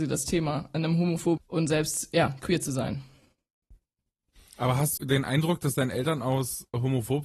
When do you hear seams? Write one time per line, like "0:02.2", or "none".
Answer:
0:01.4
0:05.0